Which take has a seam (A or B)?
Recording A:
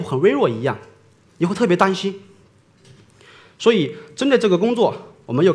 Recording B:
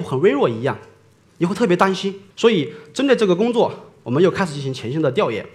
B